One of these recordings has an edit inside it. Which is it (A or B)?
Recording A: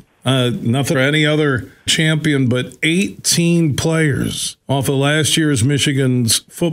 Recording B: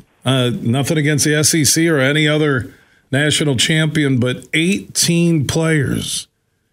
A